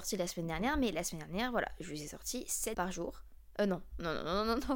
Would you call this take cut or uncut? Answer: cut